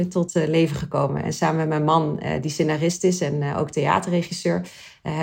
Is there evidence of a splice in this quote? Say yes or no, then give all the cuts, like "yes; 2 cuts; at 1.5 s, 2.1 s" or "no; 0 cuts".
no; 0 cuts